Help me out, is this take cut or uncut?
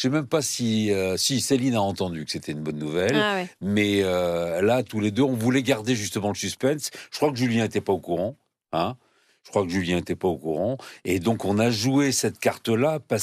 uncut